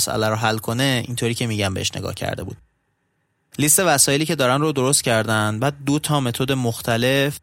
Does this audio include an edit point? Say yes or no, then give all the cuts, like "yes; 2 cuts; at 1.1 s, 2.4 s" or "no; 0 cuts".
no; 0 cuts